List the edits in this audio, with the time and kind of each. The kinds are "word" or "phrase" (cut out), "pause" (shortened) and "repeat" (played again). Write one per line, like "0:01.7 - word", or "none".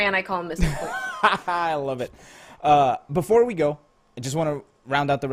0:03.9 - pause